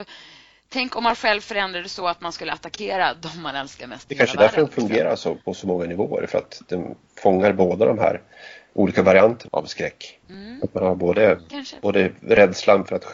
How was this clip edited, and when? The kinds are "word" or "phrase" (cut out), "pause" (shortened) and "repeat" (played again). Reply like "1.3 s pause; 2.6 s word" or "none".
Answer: 5.4 s pause; 8.7 s word; 9.5 s word; 10.2 s pause